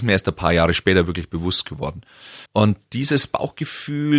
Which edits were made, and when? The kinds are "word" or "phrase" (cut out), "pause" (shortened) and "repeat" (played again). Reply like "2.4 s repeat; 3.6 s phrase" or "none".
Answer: 2.5 s pause